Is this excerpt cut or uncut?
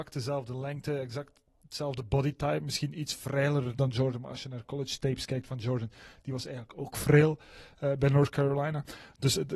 uncut